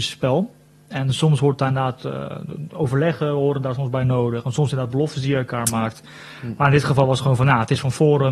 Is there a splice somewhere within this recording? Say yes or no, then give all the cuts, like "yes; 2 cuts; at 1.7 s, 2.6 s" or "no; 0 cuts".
no; 0 cuts